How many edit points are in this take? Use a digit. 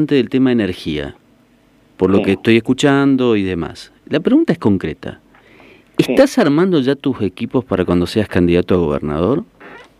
0